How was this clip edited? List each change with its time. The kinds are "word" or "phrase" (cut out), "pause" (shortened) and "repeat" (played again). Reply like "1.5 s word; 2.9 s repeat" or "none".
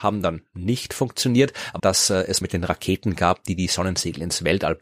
1.8 s phrase; 2.4 s word